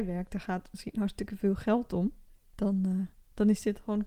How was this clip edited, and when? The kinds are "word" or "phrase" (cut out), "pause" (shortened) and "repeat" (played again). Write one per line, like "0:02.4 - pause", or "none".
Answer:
none